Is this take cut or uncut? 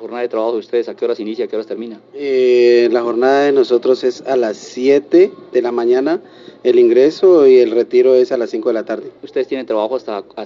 cut